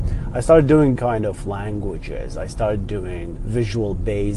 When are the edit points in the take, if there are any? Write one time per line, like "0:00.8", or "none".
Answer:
0:01.0
0:03.4